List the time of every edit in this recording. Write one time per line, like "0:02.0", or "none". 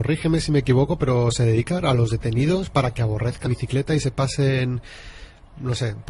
0:01.8
0:03.5